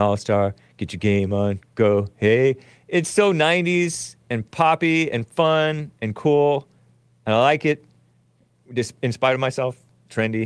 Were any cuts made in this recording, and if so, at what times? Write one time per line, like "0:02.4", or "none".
none